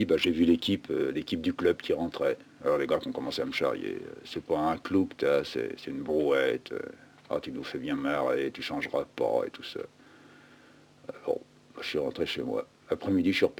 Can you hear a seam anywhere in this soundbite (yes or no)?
no